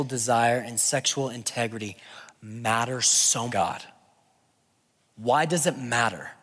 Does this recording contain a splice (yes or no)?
yes